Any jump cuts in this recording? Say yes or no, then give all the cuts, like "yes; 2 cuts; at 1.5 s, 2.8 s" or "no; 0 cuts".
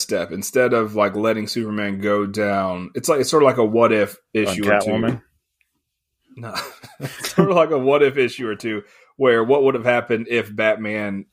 no; 0 cuts